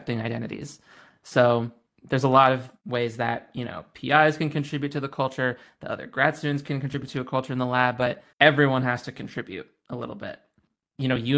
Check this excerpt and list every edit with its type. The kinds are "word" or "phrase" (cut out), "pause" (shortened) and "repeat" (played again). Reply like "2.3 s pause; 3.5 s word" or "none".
8.3 s pause

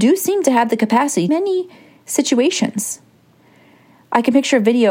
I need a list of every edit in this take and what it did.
1.3 s phrase

